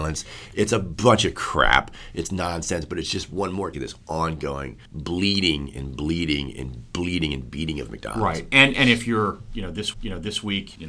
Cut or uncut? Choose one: cut